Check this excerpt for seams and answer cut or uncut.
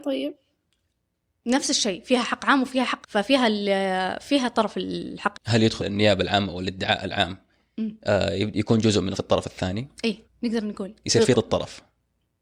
cut